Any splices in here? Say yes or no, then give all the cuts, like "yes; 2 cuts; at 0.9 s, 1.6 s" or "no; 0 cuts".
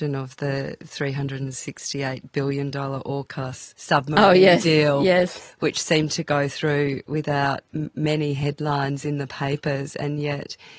no; 0 cuts